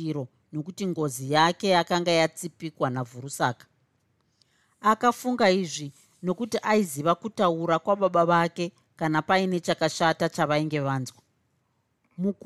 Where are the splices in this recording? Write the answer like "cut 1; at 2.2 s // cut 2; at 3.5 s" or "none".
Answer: none